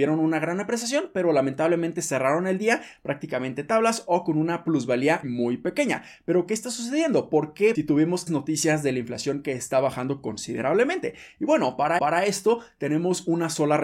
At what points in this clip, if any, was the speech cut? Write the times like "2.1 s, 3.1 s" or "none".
5.2 s, 7.7 s, 8.3 s, 12.0 s

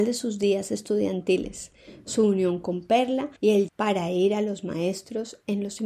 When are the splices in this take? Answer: 3.4 s, 3.7 s

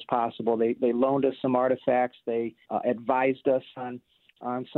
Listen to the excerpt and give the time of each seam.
2.6 s

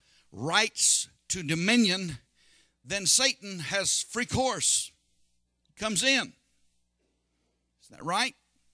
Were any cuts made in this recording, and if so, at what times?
none

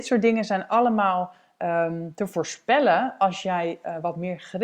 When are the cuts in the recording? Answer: none

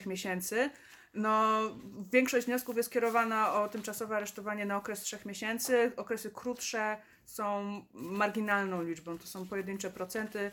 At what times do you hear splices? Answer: none

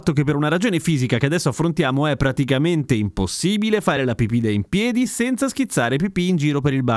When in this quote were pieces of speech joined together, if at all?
none

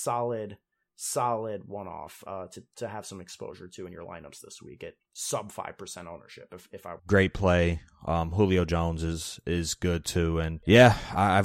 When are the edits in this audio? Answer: 5.0 s, 7.0 s

